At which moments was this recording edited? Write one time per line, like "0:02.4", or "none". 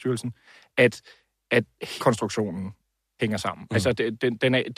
0:02.0
0:03.2